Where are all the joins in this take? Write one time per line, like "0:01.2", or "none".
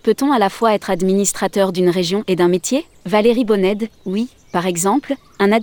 0:03.0